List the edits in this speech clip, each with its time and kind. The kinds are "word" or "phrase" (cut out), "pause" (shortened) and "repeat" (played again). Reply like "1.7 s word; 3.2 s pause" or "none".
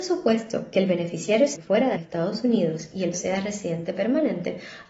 1.6 s word; 2.0 s phrase; 3.1 s word